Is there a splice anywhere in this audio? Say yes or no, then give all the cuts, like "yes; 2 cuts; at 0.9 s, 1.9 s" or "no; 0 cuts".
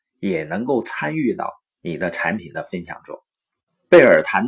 no; 0 cuts